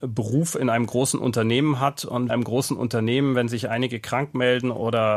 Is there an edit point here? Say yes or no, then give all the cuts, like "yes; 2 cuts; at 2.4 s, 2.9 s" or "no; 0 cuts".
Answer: yes; 1 cut; at 2.3 s